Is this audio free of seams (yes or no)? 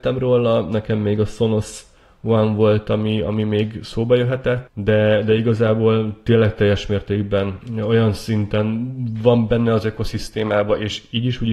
yes